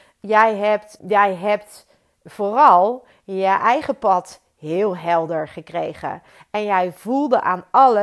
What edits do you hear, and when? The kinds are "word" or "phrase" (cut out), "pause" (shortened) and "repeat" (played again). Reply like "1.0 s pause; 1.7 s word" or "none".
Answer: 1.0 s word